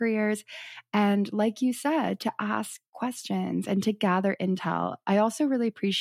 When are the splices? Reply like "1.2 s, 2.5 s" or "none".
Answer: none